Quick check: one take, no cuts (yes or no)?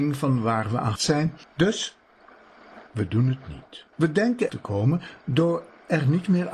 no